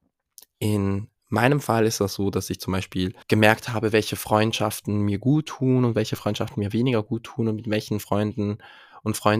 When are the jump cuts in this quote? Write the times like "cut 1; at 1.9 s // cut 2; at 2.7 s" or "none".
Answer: cut 1; at 3.2 s